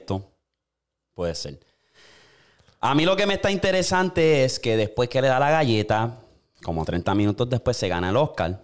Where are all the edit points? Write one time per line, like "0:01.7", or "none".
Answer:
none